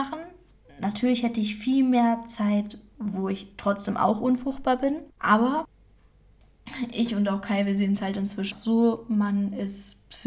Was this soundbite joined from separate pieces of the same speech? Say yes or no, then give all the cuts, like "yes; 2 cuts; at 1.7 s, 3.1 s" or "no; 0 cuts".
yes; 2 cuts; at 5.1 s, 8.5 s